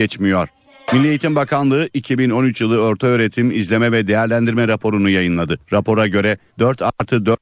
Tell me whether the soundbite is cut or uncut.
cut